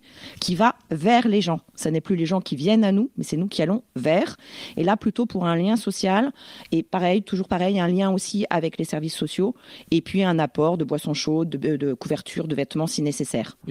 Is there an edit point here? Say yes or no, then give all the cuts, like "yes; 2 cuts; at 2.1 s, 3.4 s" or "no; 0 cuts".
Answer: no; 0 cuts